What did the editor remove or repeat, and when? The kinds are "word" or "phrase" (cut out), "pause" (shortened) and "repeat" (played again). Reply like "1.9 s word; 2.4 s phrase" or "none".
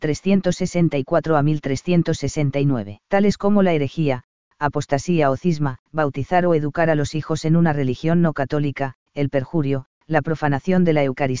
3.1 s pause; 5.8 s pause; 9.1 s pause; 9.9 s pause